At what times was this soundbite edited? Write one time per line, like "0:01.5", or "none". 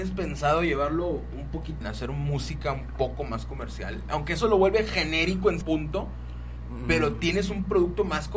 0:01.8
0:05.6